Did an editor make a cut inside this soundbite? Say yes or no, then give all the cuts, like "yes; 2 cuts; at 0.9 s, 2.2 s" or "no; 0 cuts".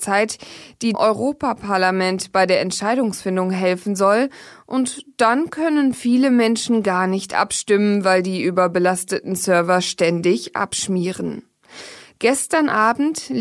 yes; 1 cut; at 0.9 s